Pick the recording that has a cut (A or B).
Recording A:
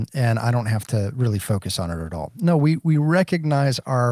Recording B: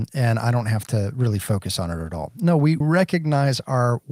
B